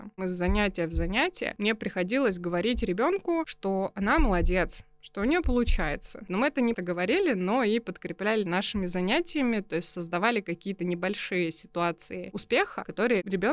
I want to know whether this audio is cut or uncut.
cut